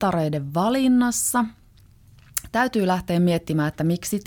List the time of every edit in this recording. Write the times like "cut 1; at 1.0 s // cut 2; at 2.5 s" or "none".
none